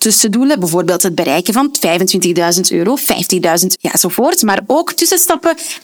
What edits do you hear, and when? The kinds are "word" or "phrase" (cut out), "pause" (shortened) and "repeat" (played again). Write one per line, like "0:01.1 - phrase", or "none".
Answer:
0:03.8 - phrase